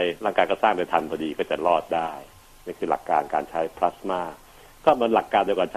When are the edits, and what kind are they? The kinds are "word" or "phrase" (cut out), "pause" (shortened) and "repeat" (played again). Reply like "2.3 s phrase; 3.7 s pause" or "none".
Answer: none